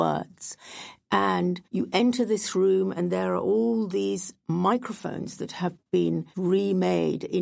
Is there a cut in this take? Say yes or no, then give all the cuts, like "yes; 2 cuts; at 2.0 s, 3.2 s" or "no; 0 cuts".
yes; 2 cuts; at 1.6 s, 6.3 s